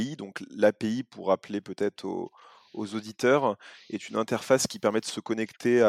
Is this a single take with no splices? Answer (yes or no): yes